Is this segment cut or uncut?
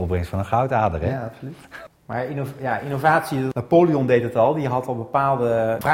uncut